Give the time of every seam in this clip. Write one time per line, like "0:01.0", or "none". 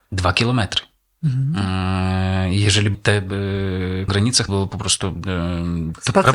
0:02.9
0:04.1
0:04.5